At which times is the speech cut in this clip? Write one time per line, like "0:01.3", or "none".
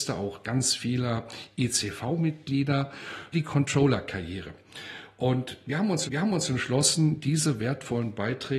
0:03.3
0:06.1